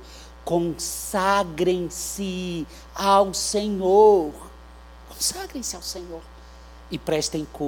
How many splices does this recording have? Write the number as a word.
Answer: zero